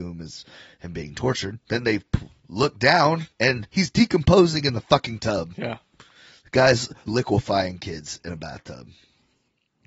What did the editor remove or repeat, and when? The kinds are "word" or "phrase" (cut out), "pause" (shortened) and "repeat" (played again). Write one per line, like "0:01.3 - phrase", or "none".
0:01.6 - pause
0:03.3 - pause
0:07.1 - word